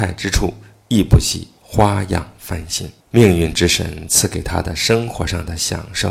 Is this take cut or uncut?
cut